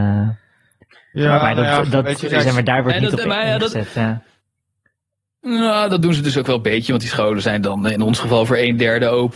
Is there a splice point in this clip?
no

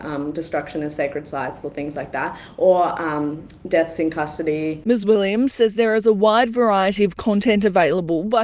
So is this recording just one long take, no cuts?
yes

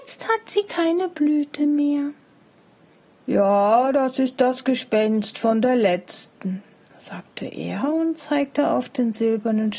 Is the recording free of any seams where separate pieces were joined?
yes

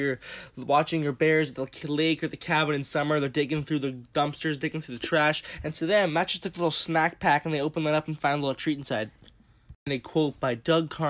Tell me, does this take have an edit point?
no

